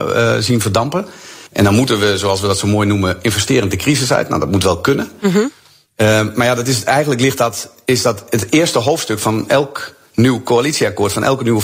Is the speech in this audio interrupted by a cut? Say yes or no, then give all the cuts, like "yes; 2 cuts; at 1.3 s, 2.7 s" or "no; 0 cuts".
yes; 1 cut; at 1.5 s